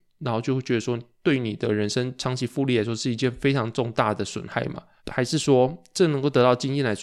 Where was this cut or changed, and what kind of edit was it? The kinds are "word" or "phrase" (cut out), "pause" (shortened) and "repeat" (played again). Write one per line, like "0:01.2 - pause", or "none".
0:05.0 - pause

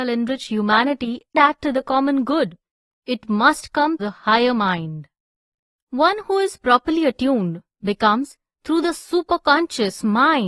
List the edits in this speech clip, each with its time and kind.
0:01.3 - word
0:04.0 - word

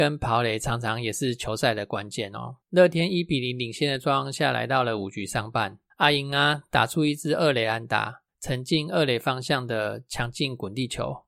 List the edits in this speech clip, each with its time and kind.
0:02.6 - pause
0:05.9 - pause
0:08.3 - pause

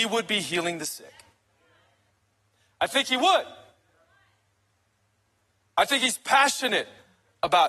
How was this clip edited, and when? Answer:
0:02.1 - pause

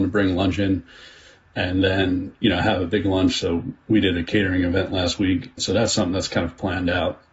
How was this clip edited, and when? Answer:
none

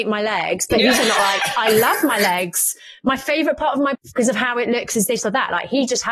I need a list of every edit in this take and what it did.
0:01.0 - word
0:03.9 - word

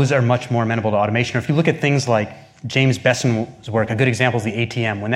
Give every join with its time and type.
none

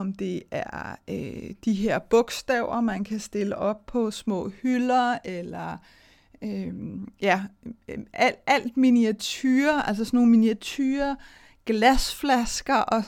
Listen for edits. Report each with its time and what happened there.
none

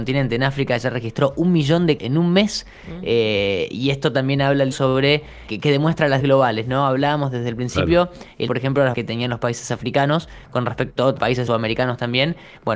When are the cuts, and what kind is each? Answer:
0:02.0 - word
0:04.7 - word
0:05.5 - word
0:06.2 - word
0:08.5 - word
0:08.9 - word
0:11.2 - word
0:11.5 - word

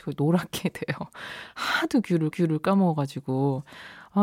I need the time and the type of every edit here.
0:02.3 - repeat

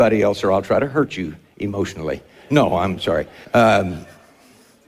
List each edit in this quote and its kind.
0:03.4 - pause

